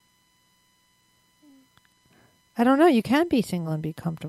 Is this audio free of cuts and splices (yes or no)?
yes